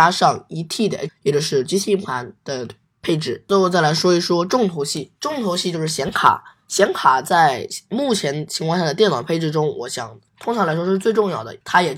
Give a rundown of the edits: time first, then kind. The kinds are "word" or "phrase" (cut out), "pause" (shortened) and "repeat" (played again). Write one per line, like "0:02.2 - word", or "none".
0:01.1 - word
0:05.2 - pause
0:10.3 - pause